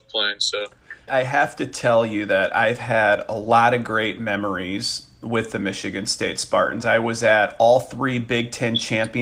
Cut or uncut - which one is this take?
cut